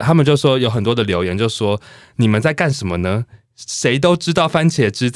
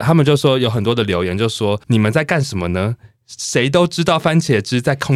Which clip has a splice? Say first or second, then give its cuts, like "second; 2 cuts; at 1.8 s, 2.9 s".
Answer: second; 1 cut; at 1.8 s